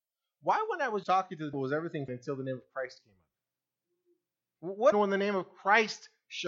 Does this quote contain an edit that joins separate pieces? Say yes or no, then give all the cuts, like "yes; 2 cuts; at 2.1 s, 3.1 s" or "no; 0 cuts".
yes; 4 cuts; at 1.0 s, 1.5 s, 2.1 s, 4.9 s